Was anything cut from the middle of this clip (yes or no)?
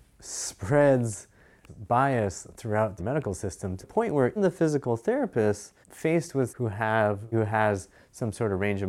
yes